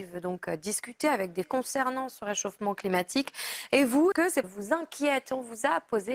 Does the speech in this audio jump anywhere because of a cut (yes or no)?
yes